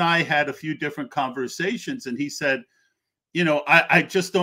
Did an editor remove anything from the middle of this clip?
no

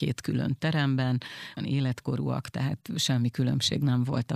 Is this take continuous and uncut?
no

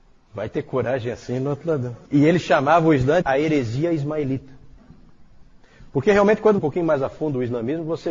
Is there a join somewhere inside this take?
yes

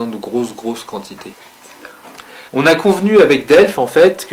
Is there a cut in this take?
yes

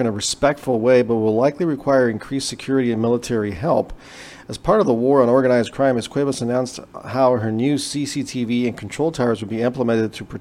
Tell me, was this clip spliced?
no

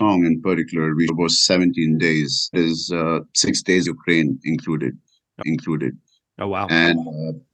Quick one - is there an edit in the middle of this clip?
yes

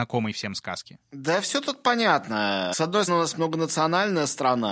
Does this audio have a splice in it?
yes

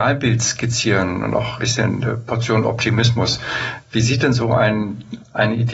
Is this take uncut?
no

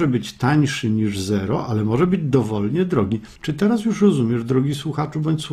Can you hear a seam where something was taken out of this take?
yes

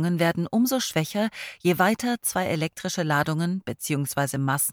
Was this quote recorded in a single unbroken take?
yes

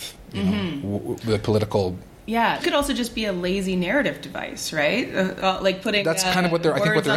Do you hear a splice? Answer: yes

